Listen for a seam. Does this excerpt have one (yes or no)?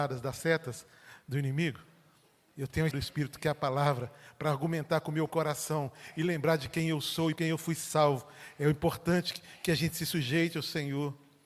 yes